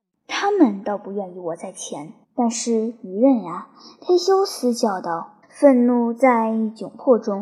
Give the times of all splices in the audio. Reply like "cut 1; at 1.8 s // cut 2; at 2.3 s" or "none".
cut 1; at 2.2 s // cut 2; at 5.4 s